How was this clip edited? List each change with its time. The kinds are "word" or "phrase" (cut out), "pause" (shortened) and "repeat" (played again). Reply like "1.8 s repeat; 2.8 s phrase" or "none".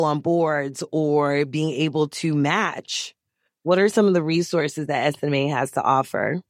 none